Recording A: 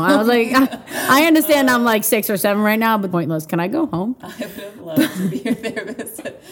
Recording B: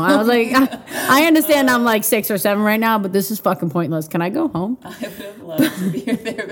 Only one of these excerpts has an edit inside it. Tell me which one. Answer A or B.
A